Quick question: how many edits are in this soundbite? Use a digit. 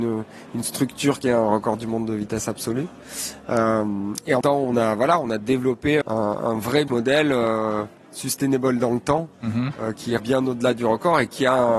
5